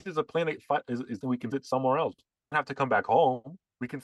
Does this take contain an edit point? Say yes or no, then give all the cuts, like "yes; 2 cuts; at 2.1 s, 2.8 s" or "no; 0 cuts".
yes; 3 cuts; at 1.2 s, 1.5 s, 2.5 s